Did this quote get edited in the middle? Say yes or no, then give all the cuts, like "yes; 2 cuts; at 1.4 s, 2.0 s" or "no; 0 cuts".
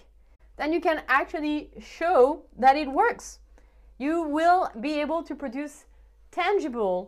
no; 0 cuts